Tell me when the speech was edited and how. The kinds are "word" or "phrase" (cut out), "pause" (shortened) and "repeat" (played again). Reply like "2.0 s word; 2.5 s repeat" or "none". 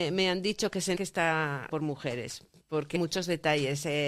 0.9 s word; 1.7 s word; 2.9 s word